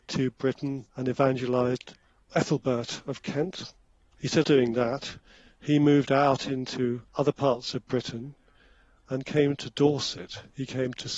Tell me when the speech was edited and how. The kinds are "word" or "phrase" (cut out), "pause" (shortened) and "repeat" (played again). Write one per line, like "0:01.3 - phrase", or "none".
0:04.4 - word